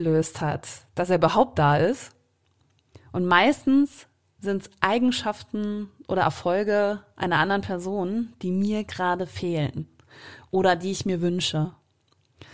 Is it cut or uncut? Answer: uncut